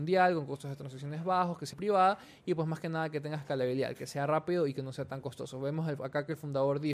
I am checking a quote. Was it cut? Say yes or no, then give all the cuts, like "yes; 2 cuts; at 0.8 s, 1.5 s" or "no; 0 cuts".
yes; 1 cut; at 1.7 s